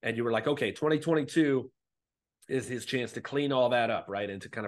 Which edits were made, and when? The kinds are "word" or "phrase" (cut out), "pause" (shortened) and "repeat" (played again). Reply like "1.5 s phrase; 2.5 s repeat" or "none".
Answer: none